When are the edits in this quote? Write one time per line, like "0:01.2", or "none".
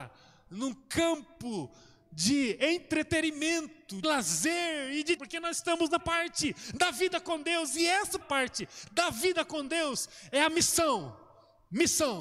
0:04.0
0:05.2
0:06.0
0:08.2